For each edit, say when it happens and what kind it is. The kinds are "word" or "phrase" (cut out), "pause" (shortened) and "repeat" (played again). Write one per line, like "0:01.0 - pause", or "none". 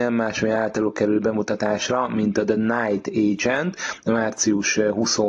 none